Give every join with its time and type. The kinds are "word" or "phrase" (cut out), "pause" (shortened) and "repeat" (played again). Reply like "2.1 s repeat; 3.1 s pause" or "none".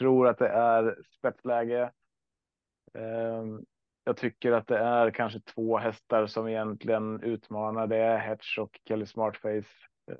none